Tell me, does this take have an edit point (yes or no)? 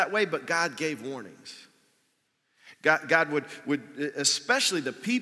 no